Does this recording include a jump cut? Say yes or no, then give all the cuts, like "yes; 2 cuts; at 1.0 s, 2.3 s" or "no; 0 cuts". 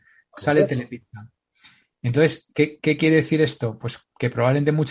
no; 0 cuts